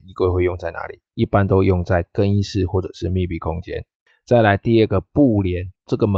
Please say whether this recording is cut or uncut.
uncut